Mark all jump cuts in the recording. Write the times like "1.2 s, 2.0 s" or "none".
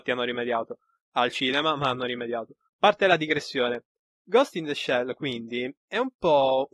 2.7 s